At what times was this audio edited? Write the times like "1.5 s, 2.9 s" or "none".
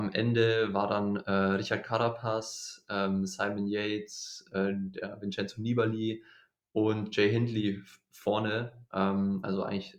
none